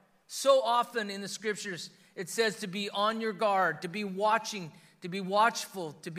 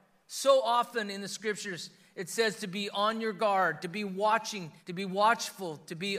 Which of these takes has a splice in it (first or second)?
second